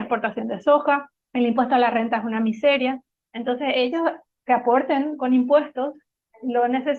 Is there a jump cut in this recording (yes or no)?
no